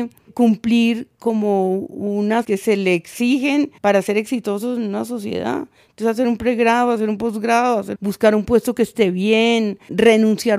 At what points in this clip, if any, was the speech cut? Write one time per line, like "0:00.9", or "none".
0:02.4
0:03.8
0:08.0